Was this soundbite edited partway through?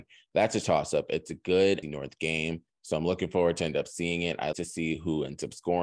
yes; 2 cuts; at 1.8 s, 4.5 s

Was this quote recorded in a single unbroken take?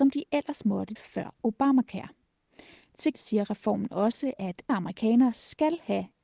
no; 3 cuts; at 1.0 s, 3.1 s, 4.7 s

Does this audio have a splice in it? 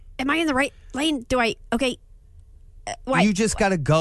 no; 0 cuts

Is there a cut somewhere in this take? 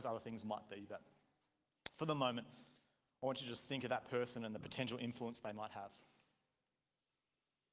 no; 0 cuts

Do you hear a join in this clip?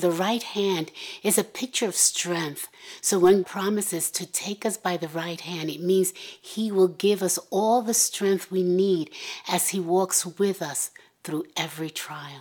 yes; 1 cut; at 3.4 s

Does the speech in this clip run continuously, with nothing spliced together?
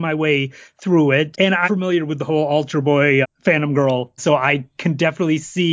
no; 4 cuts; at 1.3 s, 1.6 s, 3.2 s, 4.2 s

